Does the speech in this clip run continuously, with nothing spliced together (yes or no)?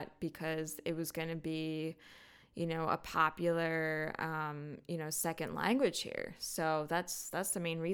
yes